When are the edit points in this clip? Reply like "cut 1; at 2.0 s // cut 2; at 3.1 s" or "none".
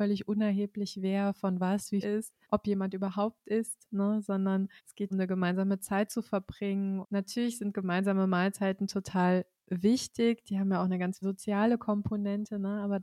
cut 1; at 2.0 s // cut 2; at 2.4 s // cut 3; at 4.8 s // cut 4; at 5.1 s // cut 5; at 7.0 s // cut 6; at 11.2 s